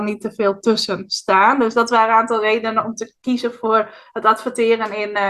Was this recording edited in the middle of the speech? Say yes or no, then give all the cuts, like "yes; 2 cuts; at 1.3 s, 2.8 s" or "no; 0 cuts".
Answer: no; 0 cuts